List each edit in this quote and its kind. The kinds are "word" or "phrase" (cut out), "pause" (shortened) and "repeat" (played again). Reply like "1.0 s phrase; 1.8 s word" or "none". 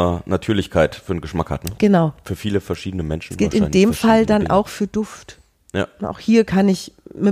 none